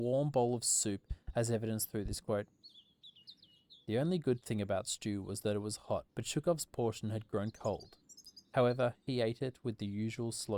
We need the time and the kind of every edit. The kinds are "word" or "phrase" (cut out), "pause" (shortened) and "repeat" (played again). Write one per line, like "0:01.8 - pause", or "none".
0:06.1 - pause
0:07.5 - word

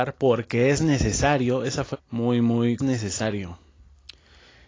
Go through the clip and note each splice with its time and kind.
0:01.9 - phrase
0:02.8 - phrase

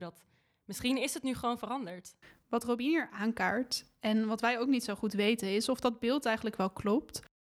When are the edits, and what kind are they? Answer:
none

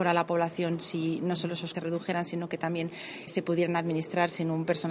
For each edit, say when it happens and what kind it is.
0:01.7 - word
0:03.3 - word

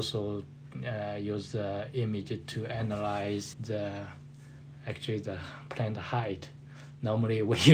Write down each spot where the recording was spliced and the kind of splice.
0:03.5 - word

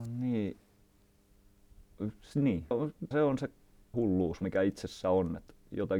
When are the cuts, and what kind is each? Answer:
0:02.7 - word
0:03.1 - word
0:03.9 - word
0:04.4 - word

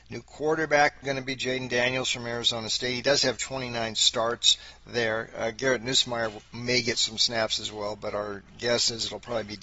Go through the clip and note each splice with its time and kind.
0:01.0 - word

